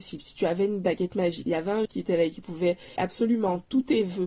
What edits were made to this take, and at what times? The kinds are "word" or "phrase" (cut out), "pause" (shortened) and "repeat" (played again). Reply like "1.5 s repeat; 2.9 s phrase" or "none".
1.5 s word; 1.9 s word; 3.0 s word